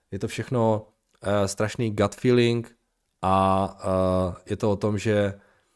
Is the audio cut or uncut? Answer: uncut